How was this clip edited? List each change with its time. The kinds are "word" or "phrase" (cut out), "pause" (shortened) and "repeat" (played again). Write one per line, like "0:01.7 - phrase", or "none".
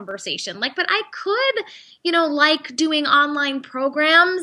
none